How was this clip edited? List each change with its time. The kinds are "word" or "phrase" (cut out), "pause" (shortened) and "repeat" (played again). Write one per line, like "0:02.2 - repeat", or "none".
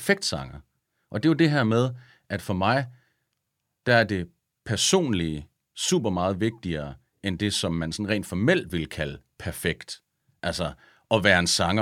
none